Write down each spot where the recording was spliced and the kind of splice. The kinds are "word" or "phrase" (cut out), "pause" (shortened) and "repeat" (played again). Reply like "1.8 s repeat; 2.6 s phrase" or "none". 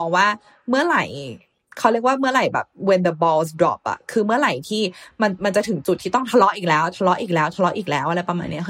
none